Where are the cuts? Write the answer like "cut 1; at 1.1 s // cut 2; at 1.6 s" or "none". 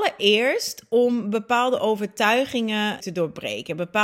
cut 1; at 3.0 s